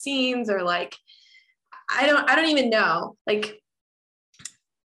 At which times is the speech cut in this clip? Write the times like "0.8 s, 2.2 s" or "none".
3.2 s